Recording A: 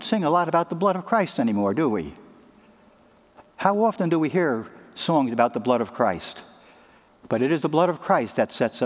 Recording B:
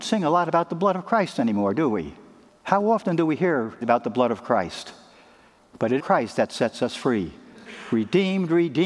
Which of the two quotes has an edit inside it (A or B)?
B